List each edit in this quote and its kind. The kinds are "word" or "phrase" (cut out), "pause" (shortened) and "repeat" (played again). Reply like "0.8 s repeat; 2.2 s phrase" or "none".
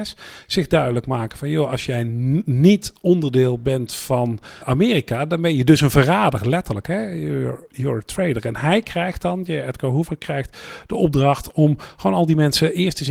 4.6 s word